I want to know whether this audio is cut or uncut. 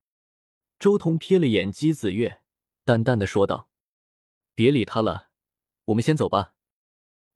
uncut